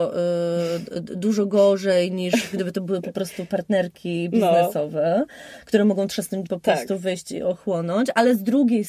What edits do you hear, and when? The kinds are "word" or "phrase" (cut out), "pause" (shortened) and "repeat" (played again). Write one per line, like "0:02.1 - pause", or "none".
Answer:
0:06.5 - word